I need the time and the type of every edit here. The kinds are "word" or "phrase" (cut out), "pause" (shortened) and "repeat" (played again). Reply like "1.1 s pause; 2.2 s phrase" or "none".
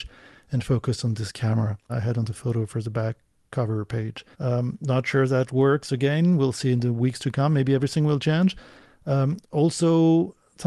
1.9 s word; 4.3 s pause